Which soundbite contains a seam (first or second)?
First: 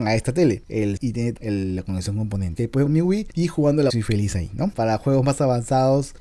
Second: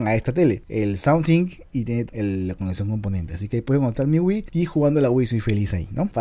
first